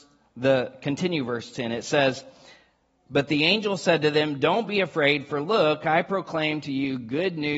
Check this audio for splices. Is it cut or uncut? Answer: uncut